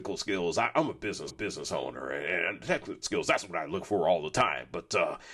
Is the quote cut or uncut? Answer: cut